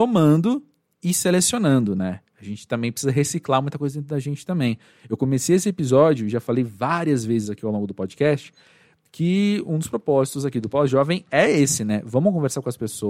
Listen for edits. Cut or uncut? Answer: uncut